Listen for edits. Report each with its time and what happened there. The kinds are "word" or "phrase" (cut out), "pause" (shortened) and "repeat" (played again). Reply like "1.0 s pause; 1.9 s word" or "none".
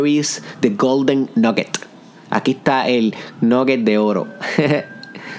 none